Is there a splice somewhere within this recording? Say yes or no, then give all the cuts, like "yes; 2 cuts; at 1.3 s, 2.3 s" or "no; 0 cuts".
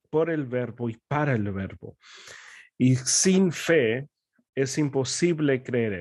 no; 0 cuts